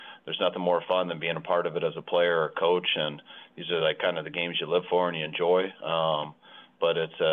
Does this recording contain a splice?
no; 0 cuts

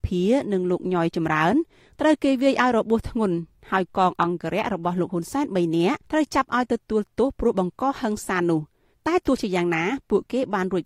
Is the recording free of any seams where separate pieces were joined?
no; 1 cut; at 6.0 s

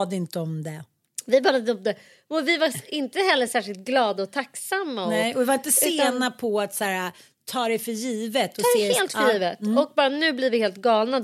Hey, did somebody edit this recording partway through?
no; 0 cuts

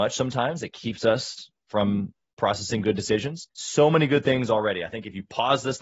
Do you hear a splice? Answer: yes; 1 cut; at 3.5 s

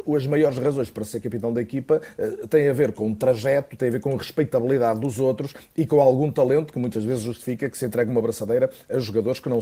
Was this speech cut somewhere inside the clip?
no; 0 cuts

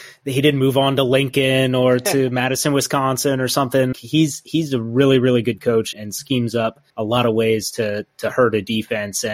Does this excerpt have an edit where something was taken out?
yes; 3 cuts; at 3.9 s, 5.9 s, 6.9 s

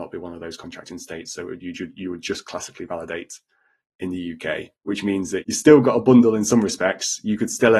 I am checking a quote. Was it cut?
yes; 1 cut; at 4.7 s

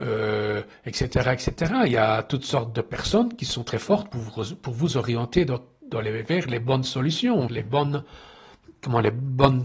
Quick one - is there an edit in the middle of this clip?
yes; 2 cuts; at 4.1 s, 7.5 s

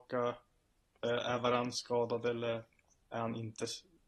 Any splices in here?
no; 0 cuts

